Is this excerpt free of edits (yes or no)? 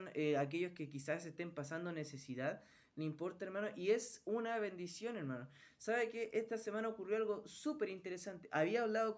yes